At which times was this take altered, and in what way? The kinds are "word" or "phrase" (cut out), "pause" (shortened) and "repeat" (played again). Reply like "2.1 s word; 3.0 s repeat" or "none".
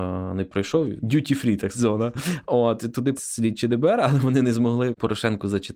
1.7 s word; 3.2 s word